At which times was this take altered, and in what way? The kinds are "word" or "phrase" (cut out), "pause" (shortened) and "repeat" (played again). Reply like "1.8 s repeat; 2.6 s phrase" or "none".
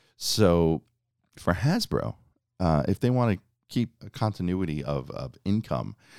4.0 s word